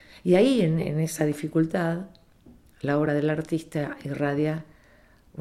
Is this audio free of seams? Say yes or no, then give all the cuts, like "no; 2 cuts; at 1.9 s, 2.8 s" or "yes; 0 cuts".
yes; 0 cuts